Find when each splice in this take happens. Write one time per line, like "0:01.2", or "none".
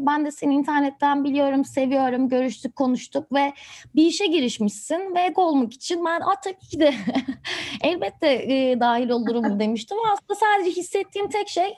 0:05.3